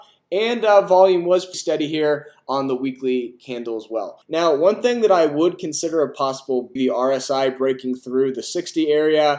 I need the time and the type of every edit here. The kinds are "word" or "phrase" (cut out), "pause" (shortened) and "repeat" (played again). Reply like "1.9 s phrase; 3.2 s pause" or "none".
1.5 s word; 4.2 s pause; 6.8 s phrase

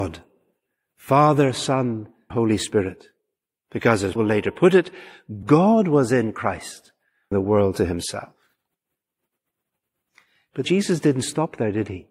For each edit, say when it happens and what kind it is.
2.3 s word; 4.2 s word; 5.4 s word; 7.3 s word; 10.6 s word

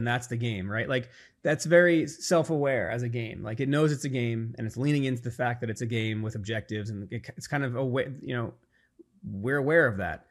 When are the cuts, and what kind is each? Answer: none

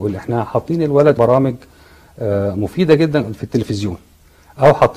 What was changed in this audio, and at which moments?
1.2 s word

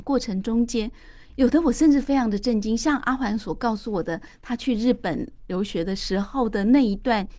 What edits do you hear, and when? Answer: none

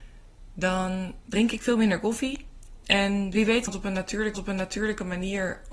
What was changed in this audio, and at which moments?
3.7 s word; 4.3 s repeat

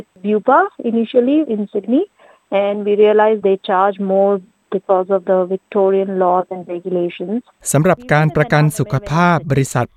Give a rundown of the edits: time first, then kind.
1.5 s word; 3.4 s word

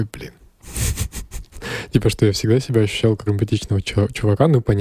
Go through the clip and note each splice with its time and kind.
3.3 s word

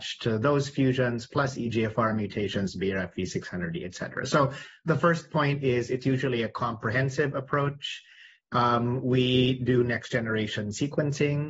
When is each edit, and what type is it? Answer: none

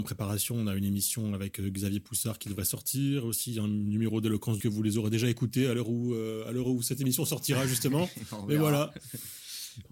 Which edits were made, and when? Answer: 4.6 s phrase

